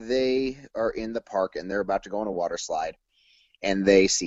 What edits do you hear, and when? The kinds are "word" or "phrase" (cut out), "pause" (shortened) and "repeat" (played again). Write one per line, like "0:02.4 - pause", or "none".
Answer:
none